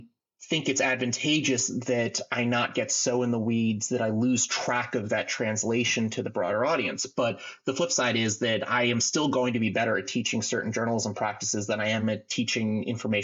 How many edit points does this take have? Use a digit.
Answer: 0